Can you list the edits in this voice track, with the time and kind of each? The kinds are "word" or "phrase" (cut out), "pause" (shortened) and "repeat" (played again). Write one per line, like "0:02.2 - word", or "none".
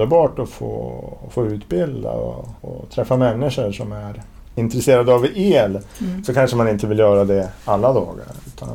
0:02.6 - pause